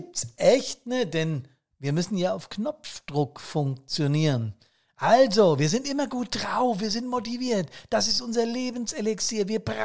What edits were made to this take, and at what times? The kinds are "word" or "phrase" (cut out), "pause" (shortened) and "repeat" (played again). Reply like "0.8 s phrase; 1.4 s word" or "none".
none